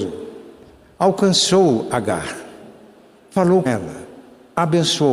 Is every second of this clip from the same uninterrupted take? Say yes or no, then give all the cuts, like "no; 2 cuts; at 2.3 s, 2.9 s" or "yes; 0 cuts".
no; 1 cut; at 3.7 s